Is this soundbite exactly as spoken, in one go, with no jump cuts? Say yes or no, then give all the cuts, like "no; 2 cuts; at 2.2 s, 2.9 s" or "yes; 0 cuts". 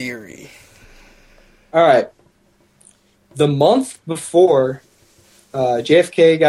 yes; 0 cuts